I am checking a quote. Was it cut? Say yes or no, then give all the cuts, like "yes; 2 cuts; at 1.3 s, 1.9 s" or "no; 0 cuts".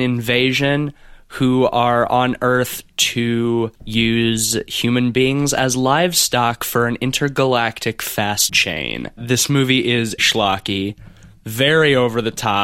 yes; 3 cuts; at 3.7 s, 8.5 s, 10.2 s